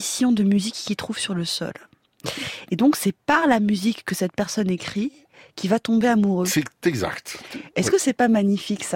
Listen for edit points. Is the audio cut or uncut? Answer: uncut